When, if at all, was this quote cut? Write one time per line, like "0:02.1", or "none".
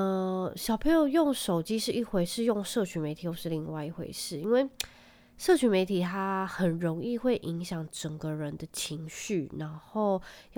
none

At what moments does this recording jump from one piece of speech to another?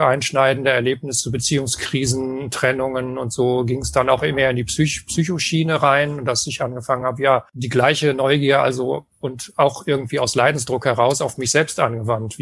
none

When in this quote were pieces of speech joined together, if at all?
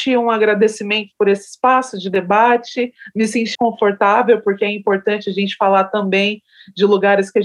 0:03.5

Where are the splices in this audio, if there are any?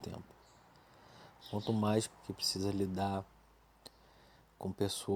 0:02.1

